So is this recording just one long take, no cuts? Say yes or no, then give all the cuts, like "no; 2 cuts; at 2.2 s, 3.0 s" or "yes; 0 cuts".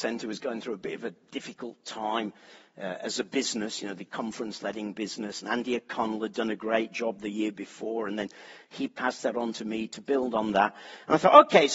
yes; 0 cuts